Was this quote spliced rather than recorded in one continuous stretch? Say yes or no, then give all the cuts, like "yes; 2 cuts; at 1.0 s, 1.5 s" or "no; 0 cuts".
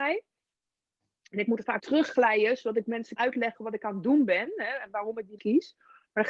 yes; 3 cuts; at 1.8 s, 3.2 s, 5.4 s